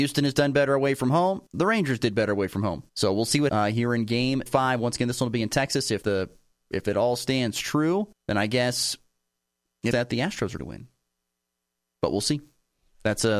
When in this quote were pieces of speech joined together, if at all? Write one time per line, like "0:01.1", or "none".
0:01.5
0:02.9
0:03.5
0:04.5
0:06.0
0:08.1
0:09.9
0:10.6